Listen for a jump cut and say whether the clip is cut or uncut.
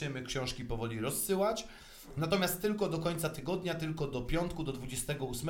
uncut